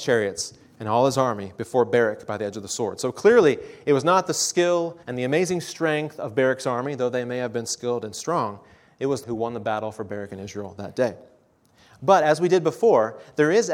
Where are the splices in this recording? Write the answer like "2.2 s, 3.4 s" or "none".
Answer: 5.0 s, 9.2 s